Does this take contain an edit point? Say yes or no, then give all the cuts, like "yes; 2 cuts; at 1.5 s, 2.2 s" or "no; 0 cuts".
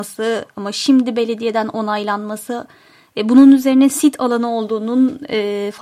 no; 0 cuts